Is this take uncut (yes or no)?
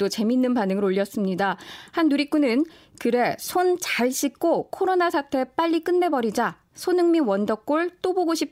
yes